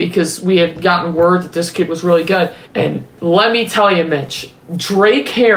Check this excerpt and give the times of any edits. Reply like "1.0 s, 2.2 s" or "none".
2.6 s, 4.6 s